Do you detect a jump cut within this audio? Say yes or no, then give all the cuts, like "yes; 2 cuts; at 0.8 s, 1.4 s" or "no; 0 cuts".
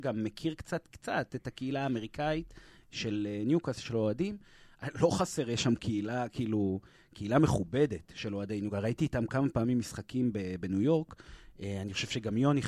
no; 0 cuts